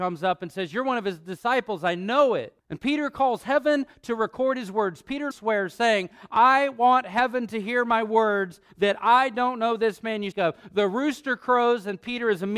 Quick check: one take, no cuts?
no; 3 cuts; at 2.6 s, 5.3 s, 10.3 s

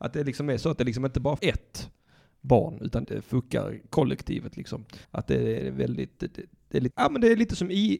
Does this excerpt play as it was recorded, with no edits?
no; 4 cuts; at 1.4 s, 3.0 s, 5.0 s, 6.9 s

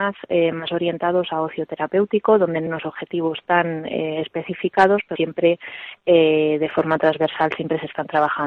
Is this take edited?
yes; 2 cuts; at 2.7 s, 5.2 s

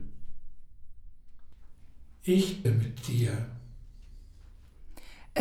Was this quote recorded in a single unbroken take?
no; 1 cut; at 2.6 s

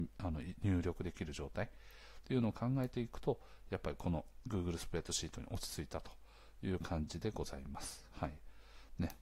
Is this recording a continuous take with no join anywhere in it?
yes; 0 cuts

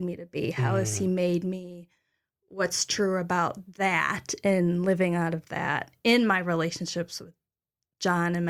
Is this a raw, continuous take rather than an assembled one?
yes; 0 cuts

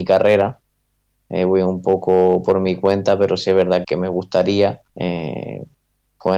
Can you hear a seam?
yes; 2 cuts; at 3.8 s, 4.9 s

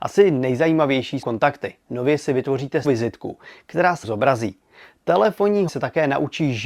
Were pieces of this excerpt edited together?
yes; 4 cuts; at 1.2 s, 2.8 s, 4.0 s, 5.7 s

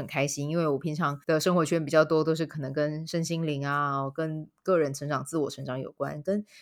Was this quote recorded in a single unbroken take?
no; 1 cut; at 1.2 s

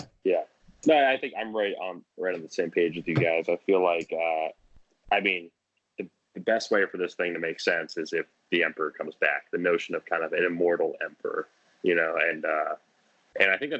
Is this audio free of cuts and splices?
yes; 0 cuts

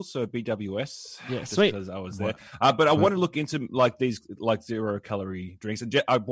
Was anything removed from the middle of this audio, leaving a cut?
no; 0 cuts

